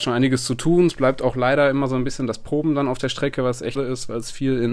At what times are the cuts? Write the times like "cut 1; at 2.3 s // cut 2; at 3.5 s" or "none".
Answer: cut 1; at 3.7 s